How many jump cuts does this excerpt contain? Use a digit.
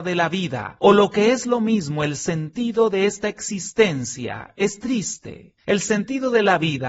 1